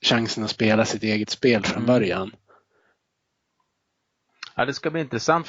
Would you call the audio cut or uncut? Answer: uncut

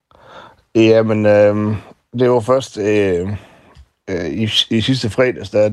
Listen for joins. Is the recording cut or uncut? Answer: uncut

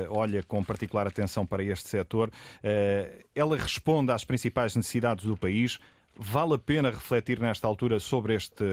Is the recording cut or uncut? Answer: uncut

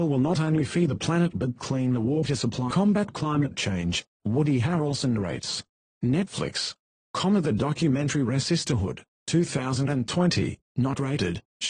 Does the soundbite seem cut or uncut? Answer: cut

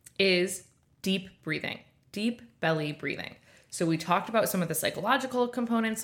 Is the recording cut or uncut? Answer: uncut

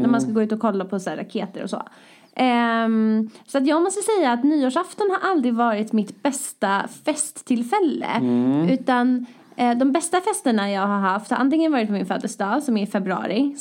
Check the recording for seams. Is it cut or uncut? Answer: uncut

